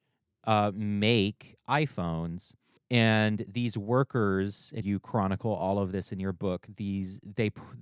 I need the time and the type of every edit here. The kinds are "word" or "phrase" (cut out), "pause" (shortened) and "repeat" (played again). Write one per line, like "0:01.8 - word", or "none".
0:02.8 - pause
0:04.8 - word